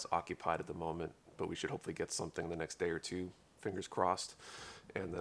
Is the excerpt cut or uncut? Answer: uncut